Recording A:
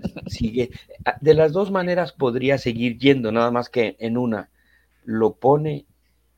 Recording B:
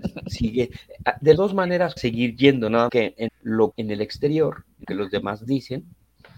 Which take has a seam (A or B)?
B